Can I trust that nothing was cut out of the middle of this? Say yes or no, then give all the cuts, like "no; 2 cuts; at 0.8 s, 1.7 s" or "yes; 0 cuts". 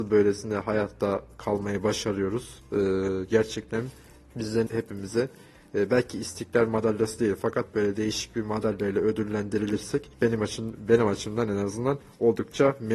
no; 2 cuts; at 4.7 s, 10.1 s